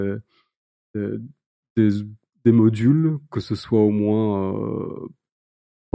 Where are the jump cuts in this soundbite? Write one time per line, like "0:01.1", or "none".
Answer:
none